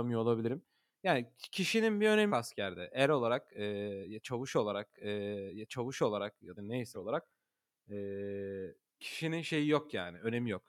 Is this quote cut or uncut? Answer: cut